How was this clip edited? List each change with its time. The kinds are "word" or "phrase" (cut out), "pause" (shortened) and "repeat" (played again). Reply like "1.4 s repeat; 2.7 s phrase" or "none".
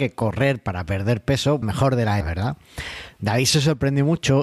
1.6 s phrase; 2.2 s word